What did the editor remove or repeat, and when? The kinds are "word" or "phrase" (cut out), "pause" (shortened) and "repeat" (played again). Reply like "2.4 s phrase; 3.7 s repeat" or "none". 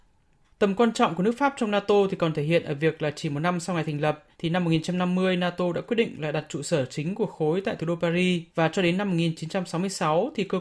4.3 s pause; 8.5 s pause